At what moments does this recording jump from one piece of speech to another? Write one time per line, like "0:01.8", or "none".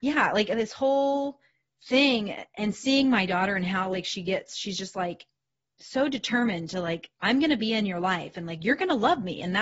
none